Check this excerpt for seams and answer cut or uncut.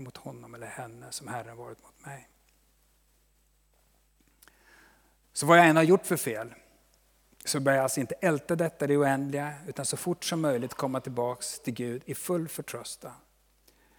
uncut